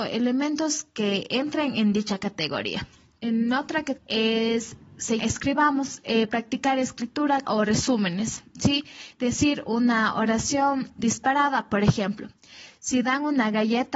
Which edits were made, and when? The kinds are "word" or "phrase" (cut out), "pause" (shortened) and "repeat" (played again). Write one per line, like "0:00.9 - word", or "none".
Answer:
0:03.2 - word
0:04.0 - word
0:05.2 - word
0:06.3 - word
0:07.4 - word
0:11.0 - word